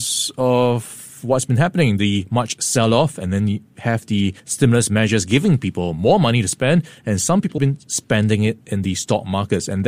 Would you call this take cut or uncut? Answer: cut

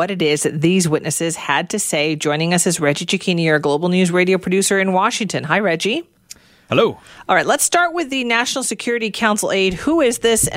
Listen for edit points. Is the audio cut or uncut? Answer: uncut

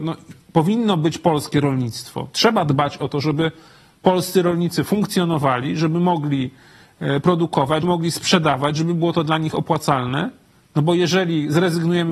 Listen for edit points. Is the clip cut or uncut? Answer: cut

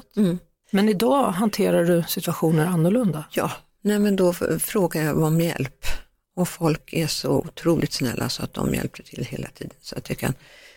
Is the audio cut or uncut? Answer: uncut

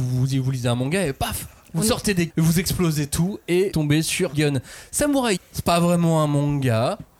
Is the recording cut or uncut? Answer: cut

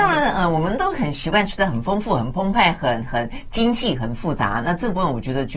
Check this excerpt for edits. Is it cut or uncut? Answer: uncut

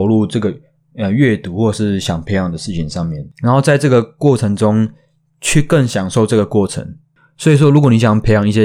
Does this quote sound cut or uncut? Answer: cut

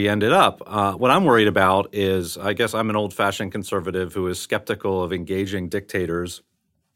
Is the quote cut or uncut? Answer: uncut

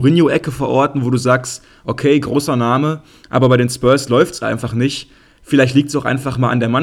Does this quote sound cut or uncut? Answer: uncut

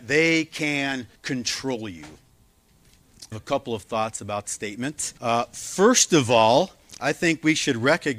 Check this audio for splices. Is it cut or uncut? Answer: cut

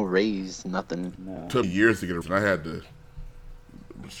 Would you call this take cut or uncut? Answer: cut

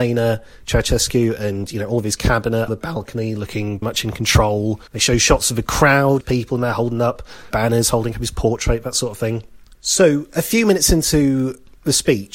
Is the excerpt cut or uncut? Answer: cut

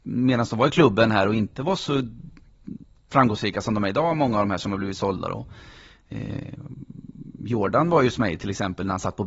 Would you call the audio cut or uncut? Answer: uncut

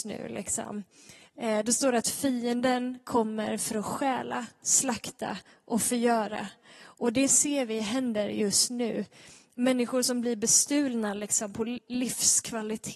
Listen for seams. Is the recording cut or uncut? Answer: cut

